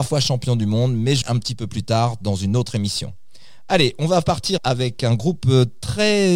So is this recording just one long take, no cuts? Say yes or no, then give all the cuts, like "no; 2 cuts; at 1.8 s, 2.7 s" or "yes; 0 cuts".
no; 2 cuts; at 1.2 s, 4.6 s